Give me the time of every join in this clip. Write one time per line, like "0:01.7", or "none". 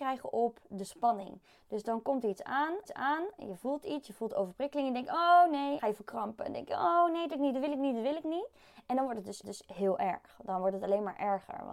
0:02.9
0:05.8
0:07.3
0:09.4